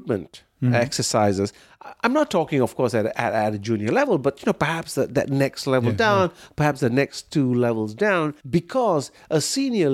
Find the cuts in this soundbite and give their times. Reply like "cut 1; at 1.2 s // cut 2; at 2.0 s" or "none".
cut 1; at 8.4 s